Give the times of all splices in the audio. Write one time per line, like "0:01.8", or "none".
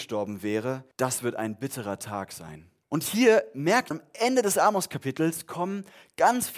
0:00.9
0:02.8
0:03.9